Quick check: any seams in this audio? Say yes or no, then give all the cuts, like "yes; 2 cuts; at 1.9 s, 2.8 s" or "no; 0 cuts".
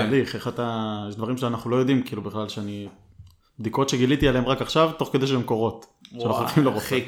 no; 0 cuts